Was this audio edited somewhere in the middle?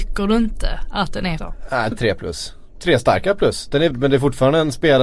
yes; 3 cuts; at 1.4 s, 1.9 s, 3.9 s

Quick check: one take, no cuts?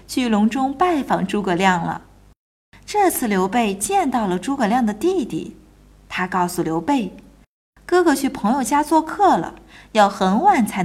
yes; 0 cuts

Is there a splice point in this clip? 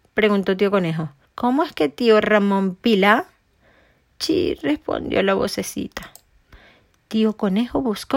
yes; 1 cut; at 1.3 s

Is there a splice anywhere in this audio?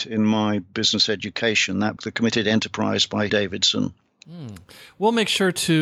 yes; 2 cuts; at 2.0 s, 3.3 s

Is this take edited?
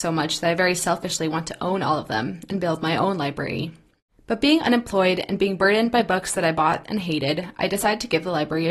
no; 0 cuts

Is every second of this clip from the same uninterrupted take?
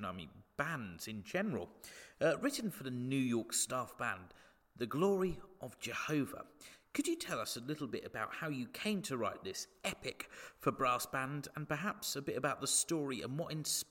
yes; 0 cuts

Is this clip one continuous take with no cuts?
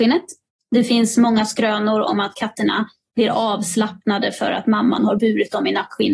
yes; 0 cuts

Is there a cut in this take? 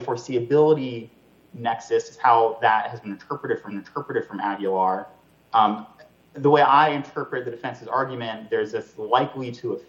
yes; 1 cut; at 3.7 s

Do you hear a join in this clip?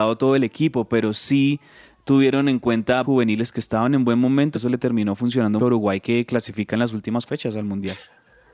yes; 4 cuts; at 3.0 s, 4.5 s, 5.6 s, 7.3 s

